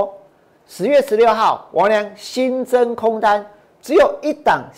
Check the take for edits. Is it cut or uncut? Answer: uncut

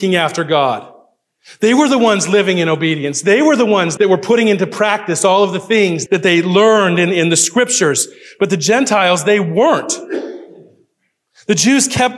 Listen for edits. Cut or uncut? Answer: cut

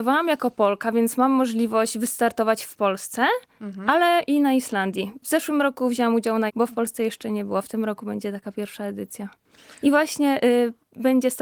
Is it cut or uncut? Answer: cut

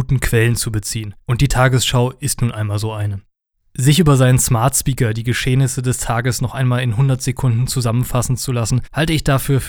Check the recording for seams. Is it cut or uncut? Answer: uncut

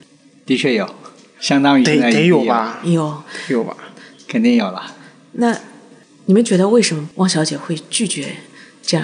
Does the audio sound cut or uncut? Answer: uncut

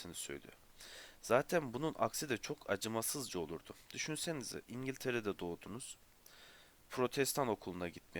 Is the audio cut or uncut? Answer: uncut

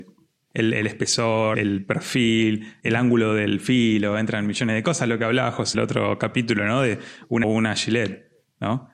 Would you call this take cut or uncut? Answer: cut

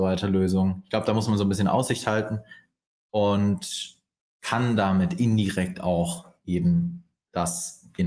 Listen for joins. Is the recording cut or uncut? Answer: uncut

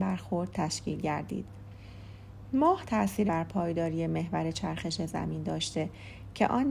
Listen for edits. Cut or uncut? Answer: cut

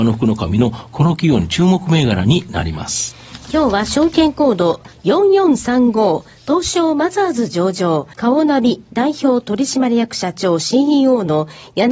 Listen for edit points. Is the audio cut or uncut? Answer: cut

